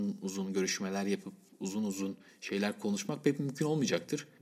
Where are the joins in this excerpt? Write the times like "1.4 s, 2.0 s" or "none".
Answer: none